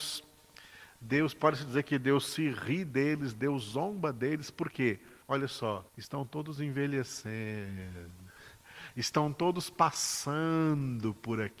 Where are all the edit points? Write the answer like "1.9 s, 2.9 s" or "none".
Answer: 5.2 s, 5.9 s

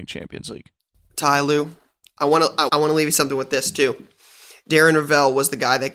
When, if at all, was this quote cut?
2.7 s

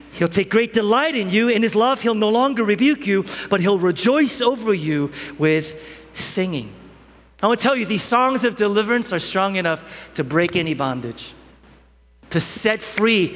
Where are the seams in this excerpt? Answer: none

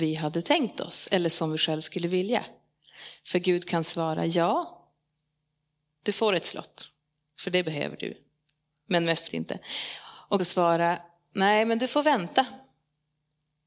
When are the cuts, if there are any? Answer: 9.3 s, 10.4 s

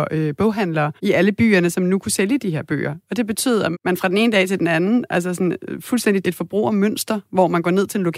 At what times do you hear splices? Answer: 1.0 s, 3.7 s, 6.2 s

